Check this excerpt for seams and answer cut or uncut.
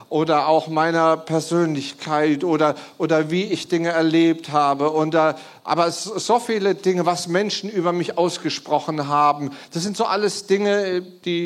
uncut